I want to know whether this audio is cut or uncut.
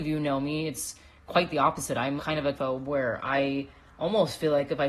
cut